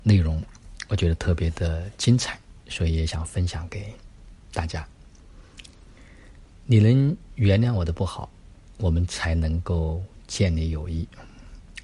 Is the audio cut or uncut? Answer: cut